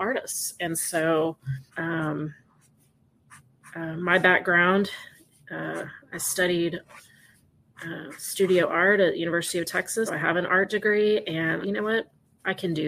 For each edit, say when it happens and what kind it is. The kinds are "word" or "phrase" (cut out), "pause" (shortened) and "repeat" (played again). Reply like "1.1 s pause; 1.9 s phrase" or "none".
1.7 s pause; 10.1 s word; 11.6 s phrase